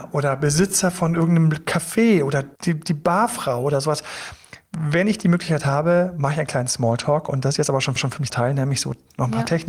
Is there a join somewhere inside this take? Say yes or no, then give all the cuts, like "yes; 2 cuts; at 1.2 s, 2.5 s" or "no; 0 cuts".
yes; 3 cuts; at 2.6 s, 8.0 s, 8.3 s